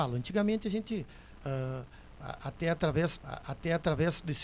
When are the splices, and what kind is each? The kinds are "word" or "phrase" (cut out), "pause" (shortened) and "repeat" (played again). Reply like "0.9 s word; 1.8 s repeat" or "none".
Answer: 3.2 s repeat